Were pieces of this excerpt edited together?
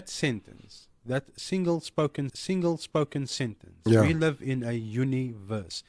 yes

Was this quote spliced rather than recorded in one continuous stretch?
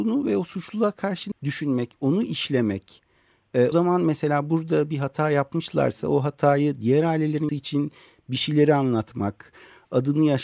yes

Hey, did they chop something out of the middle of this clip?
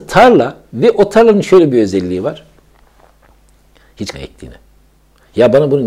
yes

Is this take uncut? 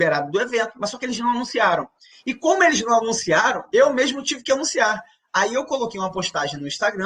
yes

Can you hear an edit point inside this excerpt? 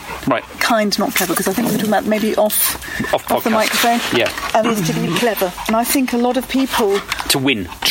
yes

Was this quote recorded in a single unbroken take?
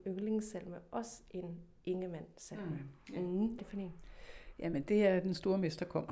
no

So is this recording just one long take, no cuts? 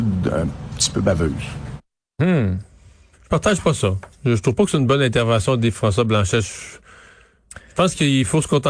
yes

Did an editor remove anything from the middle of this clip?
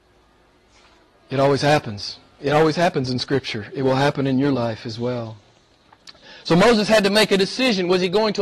no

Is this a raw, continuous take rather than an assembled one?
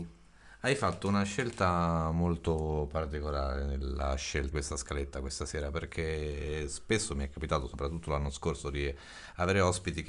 no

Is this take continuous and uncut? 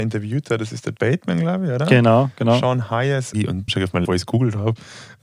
no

